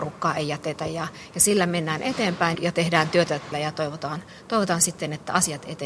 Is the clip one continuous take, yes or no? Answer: no